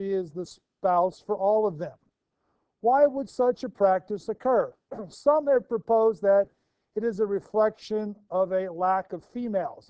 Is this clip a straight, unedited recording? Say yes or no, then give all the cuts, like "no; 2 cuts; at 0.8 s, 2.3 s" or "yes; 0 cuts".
yes; 0 cuts